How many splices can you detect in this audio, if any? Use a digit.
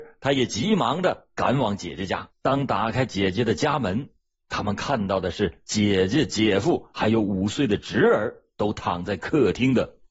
1